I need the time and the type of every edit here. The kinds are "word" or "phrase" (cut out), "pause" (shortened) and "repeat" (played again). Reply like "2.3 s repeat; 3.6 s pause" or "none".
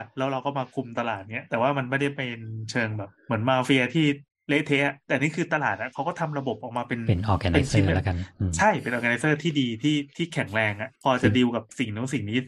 3.2 s pause; 4.3 s pause; 11.0 s pause